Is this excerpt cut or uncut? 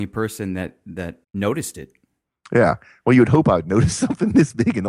cut